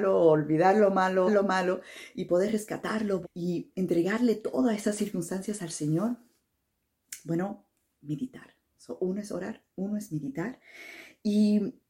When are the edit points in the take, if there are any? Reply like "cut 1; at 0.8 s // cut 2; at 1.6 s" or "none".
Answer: cut 1; at 1.3 s // cut 2; at 3.2 s